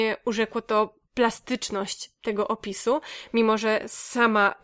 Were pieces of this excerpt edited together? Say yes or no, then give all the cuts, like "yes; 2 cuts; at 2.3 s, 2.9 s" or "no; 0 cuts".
yes; 1 cut; at 1.1 s